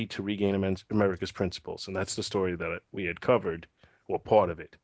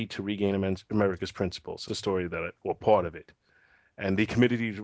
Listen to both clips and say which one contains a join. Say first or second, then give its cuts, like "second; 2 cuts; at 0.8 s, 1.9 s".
second; 2 cuts; at 1.9 s, 2.6 s